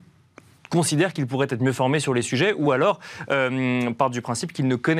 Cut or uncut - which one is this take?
uncut